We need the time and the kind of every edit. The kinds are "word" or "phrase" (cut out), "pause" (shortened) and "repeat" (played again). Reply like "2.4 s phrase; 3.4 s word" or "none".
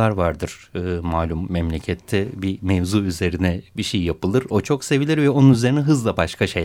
none